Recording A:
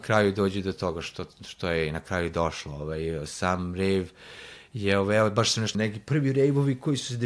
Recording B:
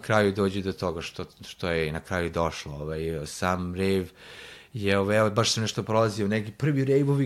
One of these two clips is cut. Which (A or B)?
A